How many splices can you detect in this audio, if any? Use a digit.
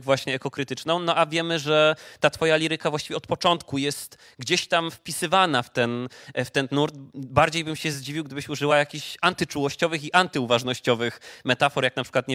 0